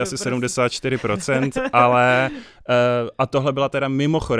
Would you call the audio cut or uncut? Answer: uncut